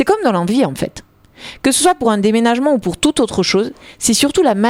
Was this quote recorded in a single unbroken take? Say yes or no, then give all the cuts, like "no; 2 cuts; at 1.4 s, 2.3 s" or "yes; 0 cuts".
yes; 0 cuts